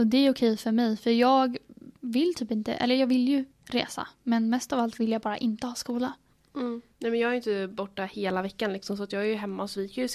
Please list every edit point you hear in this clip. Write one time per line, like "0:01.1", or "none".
0:03.5
0:06.9

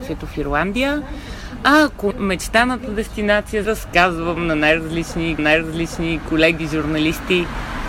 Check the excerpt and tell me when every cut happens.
0:02.1
0:03.6
0:05.4

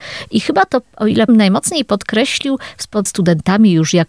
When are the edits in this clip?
0:01.3
0:03.1

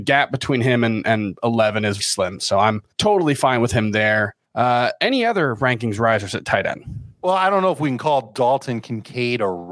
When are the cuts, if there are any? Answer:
0:02.0
0:02.9
0:04.4

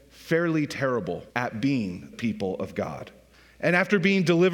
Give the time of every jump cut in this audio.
0:01.3
0:02.1
0:03.3

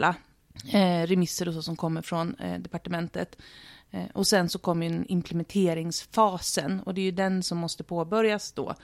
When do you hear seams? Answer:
none

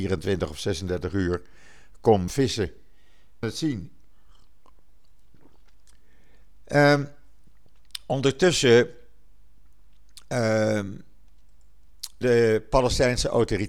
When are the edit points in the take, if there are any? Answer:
0:02.3
0:03.4
0:12.2

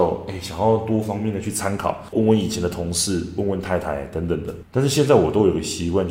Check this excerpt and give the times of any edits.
0:02.1

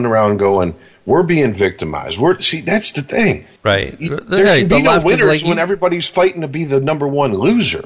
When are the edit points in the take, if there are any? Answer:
0:03.6

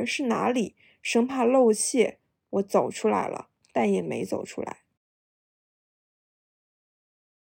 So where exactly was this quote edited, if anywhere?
none

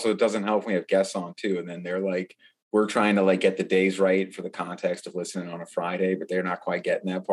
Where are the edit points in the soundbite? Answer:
none

